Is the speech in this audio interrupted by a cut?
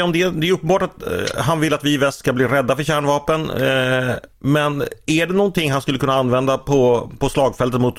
no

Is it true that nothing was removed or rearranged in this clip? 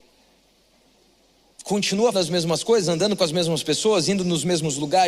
no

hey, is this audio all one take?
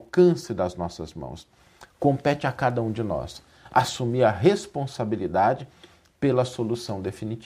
yes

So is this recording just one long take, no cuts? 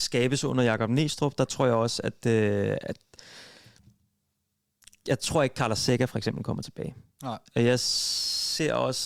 yes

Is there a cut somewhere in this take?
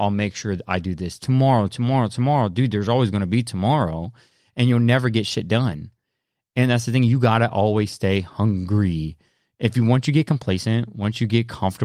no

